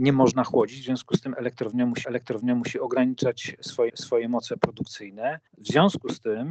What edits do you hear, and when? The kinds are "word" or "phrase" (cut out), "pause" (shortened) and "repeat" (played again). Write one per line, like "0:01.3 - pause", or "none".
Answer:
0:02.0 - repeat
0:03.9 - repeat
0:05.5 - pause